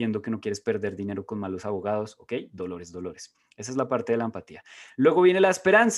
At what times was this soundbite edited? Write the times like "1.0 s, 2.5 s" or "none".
none